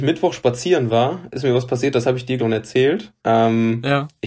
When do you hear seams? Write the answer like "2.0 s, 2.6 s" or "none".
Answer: 2.4 s, 3.2 s